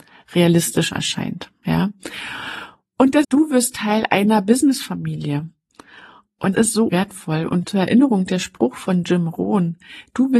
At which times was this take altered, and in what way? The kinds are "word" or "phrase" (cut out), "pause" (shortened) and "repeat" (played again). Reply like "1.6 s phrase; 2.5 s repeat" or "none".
3.2 s word; 6.5 s word; 6.9 s word; 7.6 s word